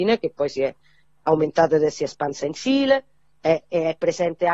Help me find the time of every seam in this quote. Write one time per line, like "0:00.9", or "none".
none